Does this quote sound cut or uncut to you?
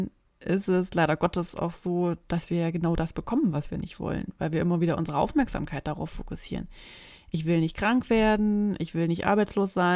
uncut